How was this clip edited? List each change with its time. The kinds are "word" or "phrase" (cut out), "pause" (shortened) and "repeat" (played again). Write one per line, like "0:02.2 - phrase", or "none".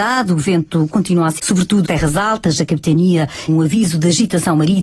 0:01.4 - word
0:01.8 - word
0:03.5 - word